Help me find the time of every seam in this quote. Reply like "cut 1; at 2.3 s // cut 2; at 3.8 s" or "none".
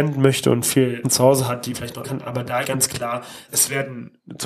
cut 1; at 1.0 s // cut 2; at 1.7 s // cut 3; at 2.0 s // cut 4; at 2.6 s // cut 5; at 3.5 s